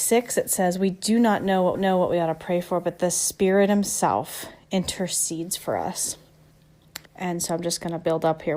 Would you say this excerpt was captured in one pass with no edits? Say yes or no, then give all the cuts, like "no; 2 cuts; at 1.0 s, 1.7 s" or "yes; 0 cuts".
no; 2 cuts; at 1.7 s, 7.1 s